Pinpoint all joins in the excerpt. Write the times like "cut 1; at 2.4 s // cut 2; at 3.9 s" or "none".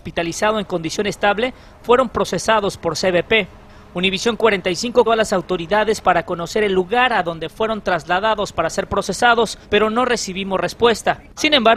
cut 1; at 5.1 s // cut 2; at 9.6 s